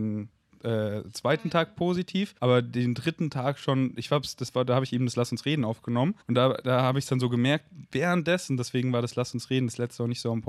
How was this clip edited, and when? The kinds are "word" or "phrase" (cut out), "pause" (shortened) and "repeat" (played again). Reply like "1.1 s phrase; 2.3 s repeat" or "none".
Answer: 2.4 s pause; 6.2 s pause